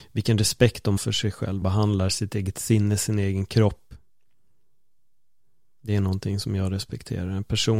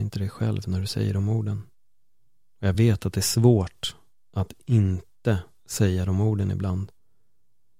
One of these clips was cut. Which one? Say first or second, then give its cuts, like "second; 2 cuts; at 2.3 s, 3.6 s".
first; 2 cuts; at 1.0 s, 1.6 s